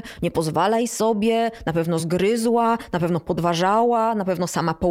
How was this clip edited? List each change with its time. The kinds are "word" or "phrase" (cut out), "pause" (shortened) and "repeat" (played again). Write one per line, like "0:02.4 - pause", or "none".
none